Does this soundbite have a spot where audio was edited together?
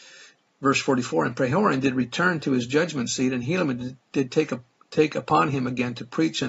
no; 0 cuts

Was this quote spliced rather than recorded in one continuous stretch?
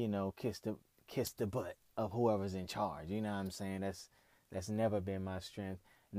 no; 0 cuts

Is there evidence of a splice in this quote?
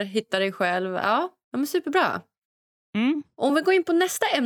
no; 0 cuts

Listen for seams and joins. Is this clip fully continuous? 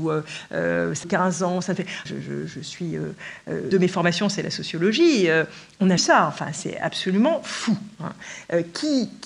no; 4 cuts; at 1.0 s, 2.1 s, 3.7 s, 6.0 s

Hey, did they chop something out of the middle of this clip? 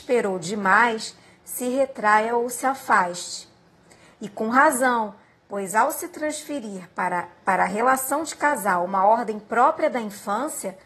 no; 0 cuts

